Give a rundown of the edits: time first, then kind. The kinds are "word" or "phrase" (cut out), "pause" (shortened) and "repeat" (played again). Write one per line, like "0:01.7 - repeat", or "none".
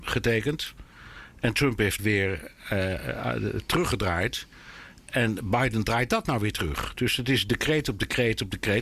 0:02.0 - phrase